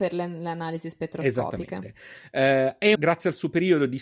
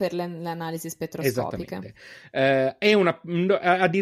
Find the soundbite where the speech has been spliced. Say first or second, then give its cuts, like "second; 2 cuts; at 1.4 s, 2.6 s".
first; 1 cut; at 2.9 s